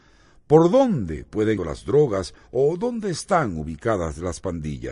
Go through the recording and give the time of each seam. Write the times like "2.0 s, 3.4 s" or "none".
1.6 s, 2.4 s